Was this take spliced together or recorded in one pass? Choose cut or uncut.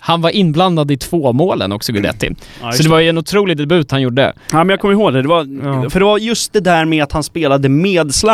uncut